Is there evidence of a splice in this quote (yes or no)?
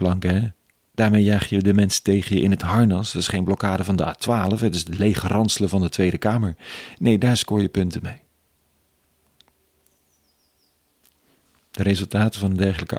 no